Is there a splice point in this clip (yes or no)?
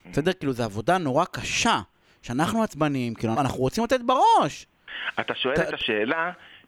yes